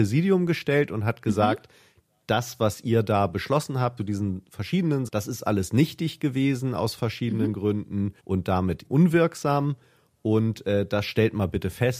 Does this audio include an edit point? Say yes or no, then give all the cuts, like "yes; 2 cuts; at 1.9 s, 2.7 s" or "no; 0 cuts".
yes; 4 cuts; at 4.0 s, 5.1 s, 8.2 s, 8.9 s